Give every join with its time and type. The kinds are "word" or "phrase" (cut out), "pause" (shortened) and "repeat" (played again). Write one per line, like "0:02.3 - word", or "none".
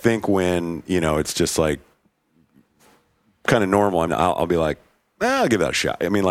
0:04.1 - word

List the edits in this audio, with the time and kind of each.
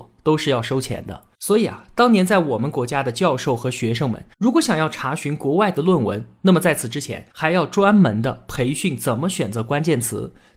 0:01.3 - pause
0:04.3 - pause
0:07.3 - pause

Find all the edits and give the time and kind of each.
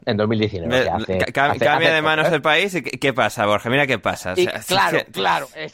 none

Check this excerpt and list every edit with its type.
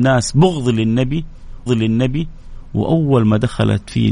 0:01.7 - repeat

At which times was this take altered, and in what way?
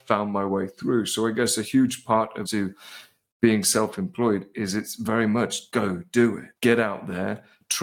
0:02.5 - phrase
0:05.7 - word
0:06.6 - pause

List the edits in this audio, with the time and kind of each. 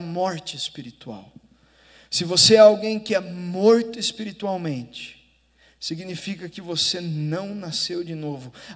none

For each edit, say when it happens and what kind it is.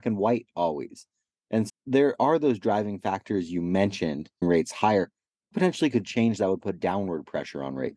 0:01.7 - word
0:04.4 - word
0:05.5 - word

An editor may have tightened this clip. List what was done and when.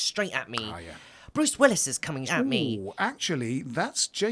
0:02.2 - word

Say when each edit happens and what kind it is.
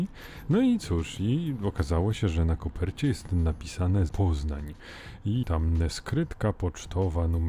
0:04.1 - word
0:05.4 - word

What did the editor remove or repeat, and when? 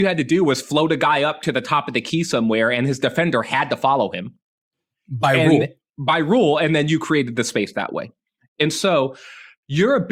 none

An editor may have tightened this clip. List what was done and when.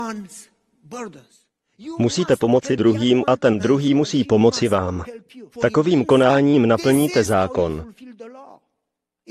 0:05.5 - pause

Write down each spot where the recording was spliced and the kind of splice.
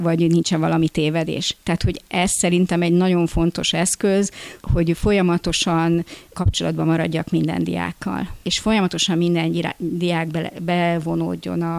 none

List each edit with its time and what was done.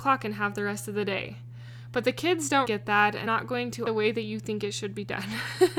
0:02.6 - word
0:03.3 - word
0:03.9 - phrase

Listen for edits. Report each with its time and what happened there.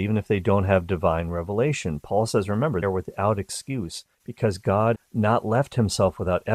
0:02.8 - word
0:04.1 - pause
0:04.9 - word

